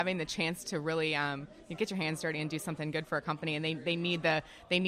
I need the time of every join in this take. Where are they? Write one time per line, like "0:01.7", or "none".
none